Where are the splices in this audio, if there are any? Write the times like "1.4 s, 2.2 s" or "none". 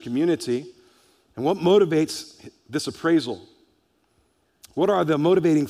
none